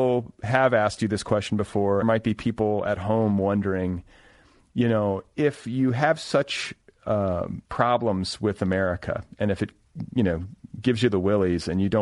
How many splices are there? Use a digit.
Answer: 2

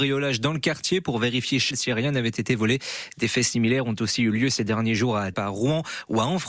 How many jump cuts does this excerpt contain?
2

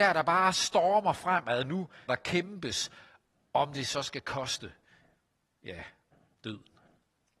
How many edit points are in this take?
1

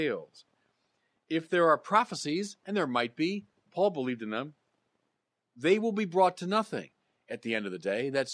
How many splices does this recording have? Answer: 0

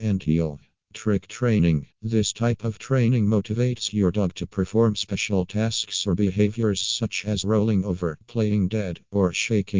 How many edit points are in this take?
1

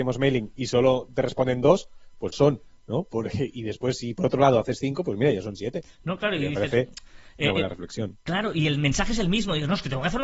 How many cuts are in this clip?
1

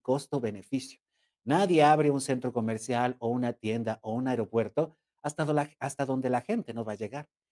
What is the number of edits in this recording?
0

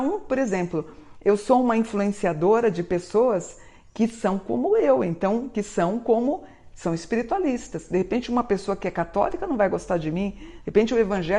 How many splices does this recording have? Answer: 0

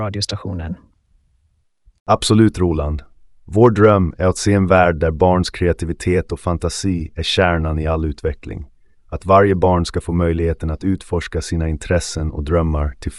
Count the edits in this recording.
0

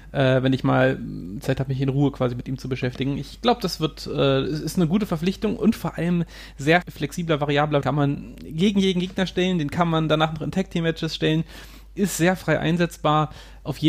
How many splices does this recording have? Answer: 2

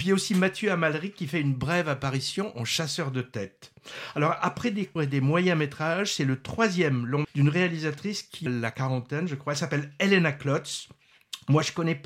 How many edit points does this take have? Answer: 3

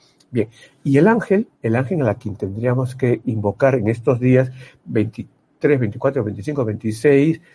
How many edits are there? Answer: 1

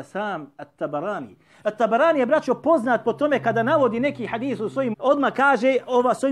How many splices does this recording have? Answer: 1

